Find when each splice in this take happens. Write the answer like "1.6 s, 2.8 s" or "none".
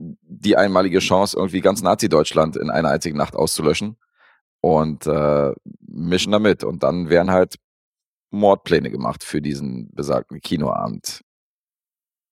none